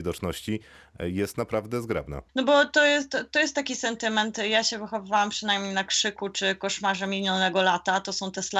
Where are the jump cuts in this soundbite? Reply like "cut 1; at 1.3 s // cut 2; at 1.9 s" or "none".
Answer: cut 1; at 2.3 s

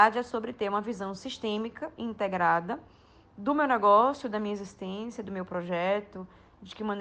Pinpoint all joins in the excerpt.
none

